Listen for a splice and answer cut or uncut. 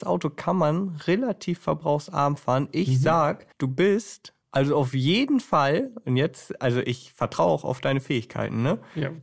cut